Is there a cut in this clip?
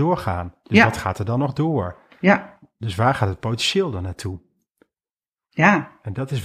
no; 0 cuts

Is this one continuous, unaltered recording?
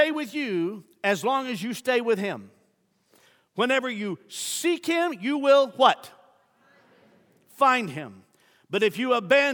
yes; 0 cuts

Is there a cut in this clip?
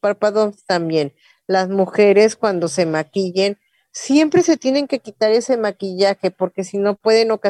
no; 0 cuts

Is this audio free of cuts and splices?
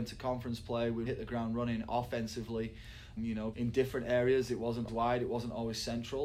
no; 4 cuts; at 1.1 s, 3.2 s, 3.5 s, 4.9 s

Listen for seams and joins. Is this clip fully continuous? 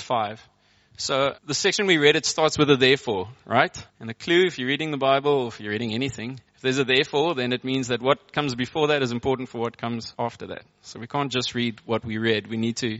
no; 4 cuts; at 1.4 s, 3.9 s, 6.5 s, 10.1 s

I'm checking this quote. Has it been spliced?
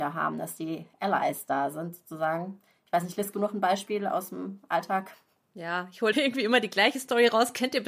yes; 2 cuts; at 3.3 s, 6.1 s

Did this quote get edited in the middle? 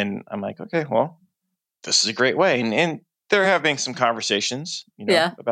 no; 0 cuts

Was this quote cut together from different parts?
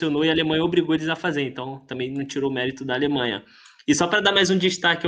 no; 0 cuts

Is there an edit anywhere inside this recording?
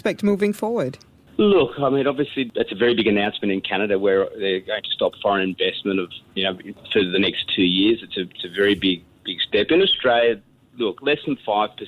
no; 0 cuts

